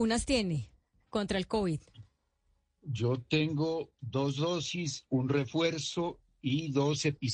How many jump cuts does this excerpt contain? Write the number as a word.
zero